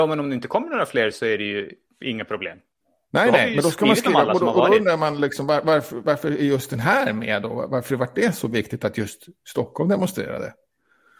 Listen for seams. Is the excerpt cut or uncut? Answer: uncut